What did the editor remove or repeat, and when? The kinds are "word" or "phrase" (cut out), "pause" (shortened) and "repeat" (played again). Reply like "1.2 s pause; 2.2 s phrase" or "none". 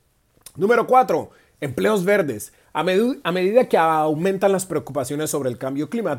none